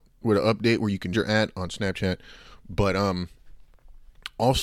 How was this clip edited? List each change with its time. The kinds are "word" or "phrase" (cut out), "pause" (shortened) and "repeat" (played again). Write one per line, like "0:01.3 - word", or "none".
0:01.1 - word